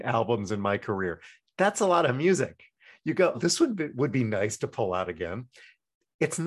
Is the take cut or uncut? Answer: cut